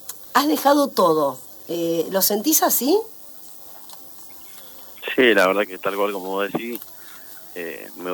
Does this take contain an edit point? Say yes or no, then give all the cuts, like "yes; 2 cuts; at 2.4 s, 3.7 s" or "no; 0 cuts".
yes; 1 cut; at 5.6 s